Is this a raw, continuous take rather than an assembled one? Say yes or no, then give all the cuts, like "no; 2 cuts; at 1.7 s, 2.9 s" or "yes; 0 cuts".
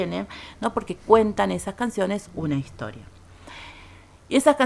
yes; 0 cuts